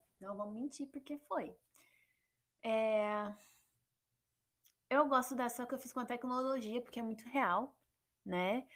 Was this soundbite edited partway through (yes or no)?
yes